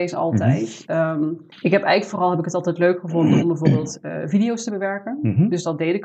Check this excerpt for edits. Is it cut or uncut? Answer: cut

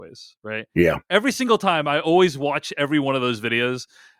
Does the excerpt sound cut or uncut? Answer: uncut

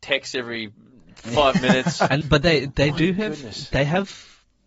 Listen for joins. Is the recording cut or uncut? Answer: cut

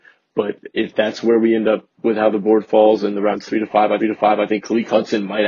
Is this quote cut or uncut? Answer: cut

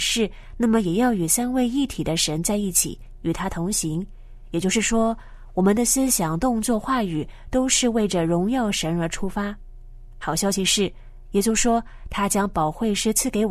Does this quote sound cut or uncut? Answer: uncut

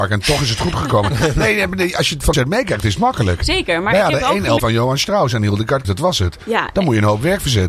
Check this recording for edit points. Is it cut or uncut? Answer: cut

